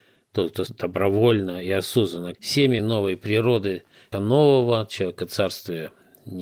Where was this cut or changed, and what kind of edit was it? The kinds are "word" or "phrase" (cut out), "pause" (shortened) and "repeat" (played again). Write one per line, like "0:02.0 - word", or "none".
0:02.3 - word
0:02.8 - phrase
0:04.1 - word